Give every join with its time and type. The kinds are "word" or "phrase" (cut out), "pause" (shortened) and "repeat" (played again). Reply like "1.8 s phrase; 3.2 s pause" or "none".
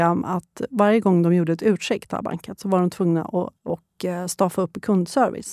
3.6 s pause